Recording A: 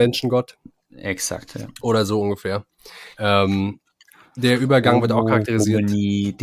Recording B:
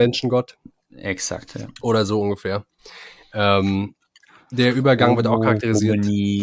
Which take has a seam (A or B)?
A